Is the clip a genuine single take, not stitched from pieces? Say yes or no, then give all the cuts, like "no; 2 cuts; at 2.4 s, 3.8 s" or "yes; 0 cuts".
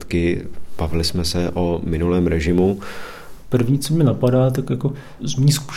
yes; 0 cuts